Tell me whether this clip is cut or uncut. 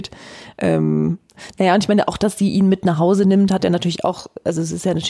uncut